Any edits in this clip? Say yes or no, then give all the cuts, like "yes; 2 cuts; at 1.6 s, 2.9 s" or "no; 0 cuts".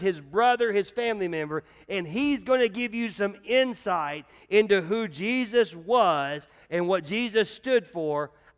no; 0 cuts